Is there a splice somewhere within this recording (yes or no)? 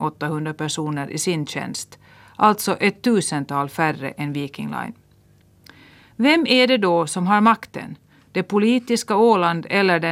no